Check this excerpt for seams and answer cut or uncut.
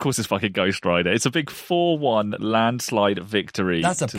uncut